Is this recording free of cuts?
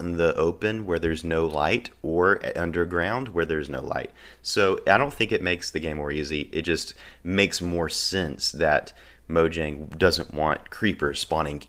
yes; 0 cuts

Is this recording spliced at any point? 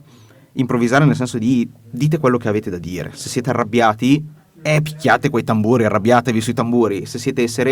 no; 0 cuts

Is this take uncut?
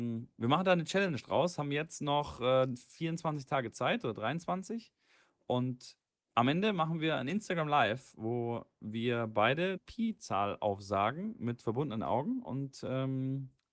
no; 1 cut; at 9.8 s

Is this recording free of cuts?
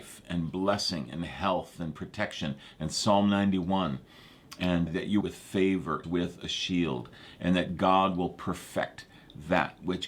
no; 3 cuts; at 4.9 s, 5.2 s, 6.0 s

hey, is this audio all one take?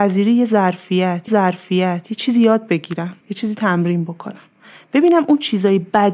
no; 2 cuts; at 1.3 s, 3.2 s

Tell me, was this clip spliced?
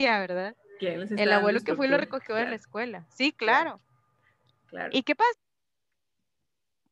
no; 0 cuts

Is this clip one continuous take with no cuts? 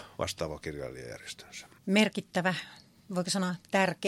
no; 1 cut; at 1.8 s

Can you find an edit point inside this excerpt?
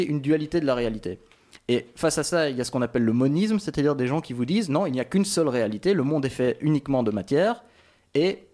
no; 0 cuts

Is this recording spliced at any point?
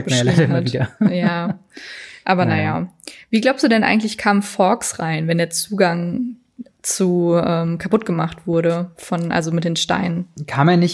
no; 0 cuts

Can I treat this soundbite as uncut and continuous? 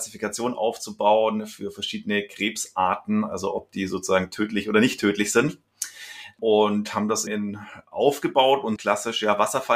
no; 2 cuts; at 7.3 s, 8.8 s

